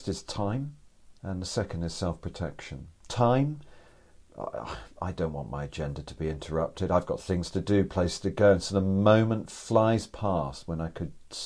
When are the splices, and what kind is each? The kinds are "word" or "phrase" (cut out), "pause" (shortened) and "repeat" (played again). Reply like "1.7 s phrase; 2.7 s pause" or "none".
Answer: 1.2 s pause; 3.0 s pause